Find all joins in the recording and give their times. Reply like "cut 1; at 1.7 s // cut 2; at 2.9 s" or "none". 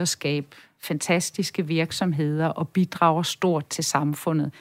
none